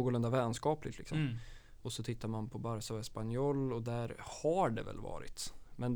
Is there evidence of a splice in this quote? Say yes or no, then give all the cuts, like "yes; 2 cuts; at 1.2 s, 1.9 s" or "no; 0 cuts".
no; 0 cuts